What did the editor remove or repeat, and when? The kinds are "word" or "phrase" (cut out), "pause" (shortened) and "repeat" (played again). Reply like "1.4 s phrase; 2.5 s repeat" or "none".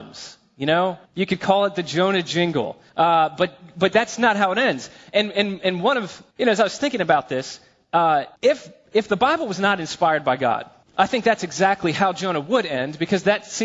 1.1 s pause; 2.9 s pause; 6.3 s pause; 8.4 s pause; 10.8 s pause